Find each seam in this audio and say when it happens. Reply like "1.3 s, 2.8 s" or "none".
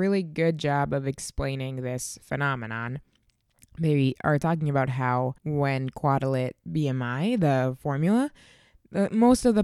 5.4 s, 6.7 s